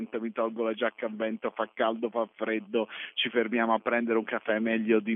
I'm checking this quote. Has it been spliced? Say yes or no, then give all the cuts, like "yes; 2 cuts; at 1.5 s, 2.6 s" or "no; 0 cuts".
no; 0 cuts